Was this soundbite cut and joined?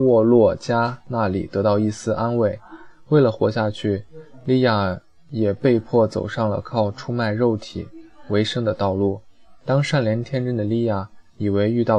no; 0 cuts

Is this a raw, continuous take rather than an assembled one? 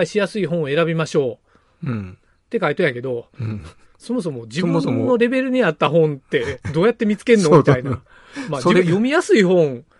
yes; 0 cuts

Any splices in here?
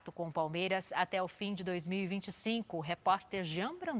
no; 0 cuts

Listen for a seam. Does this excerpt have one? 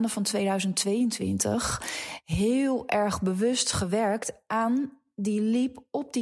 no; 0 cuts

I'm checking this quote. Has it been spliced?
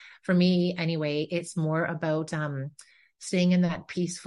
no; 0 cuts

